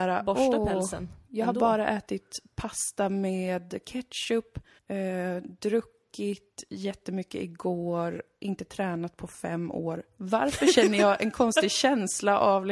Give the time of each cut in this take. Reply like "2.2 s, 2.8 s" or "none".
4.8 s